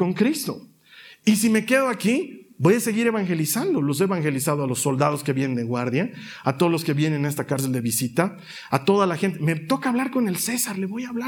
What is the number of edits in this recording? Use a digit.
0